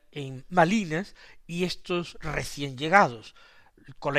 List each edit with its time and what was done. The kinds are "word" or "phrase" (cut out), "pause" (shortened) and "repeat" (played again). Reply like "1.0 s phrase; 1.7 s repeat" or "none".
none